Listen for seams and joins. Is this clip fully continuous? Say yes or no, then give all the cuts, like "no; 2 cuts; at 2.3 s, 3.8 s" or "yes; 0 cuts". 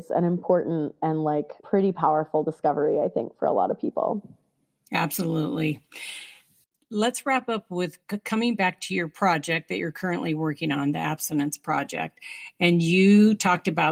no; 1 cut; at 1.6 s